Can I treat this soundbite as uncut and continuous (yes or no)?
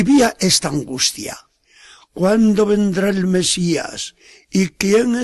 yes